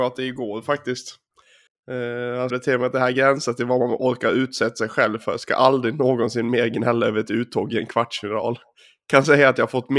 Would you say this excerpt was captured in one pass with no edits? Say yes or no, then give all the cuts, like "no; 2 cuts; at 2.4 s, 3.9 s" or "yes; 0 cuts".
no; 2 cuts; at 1.7 s, 2.5 s